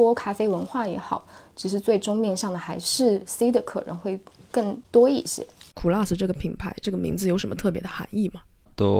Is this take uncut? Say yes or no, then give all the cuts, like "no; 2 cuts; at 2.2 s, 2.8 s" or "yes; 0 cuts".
yes; 0 cuts